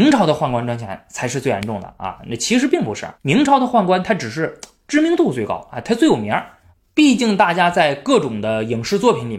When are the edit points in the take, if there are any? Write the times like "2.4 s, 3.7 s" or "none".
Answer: 3.2 s